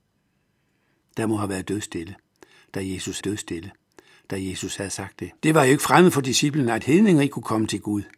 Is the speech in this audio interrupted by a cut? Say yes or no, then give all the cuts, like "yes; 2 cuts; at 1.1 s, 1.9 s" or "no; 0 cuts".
yes; 2 cuts; at 3.2 s, 5.4 s